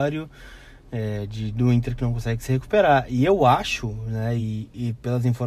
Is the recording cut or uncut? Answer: uncut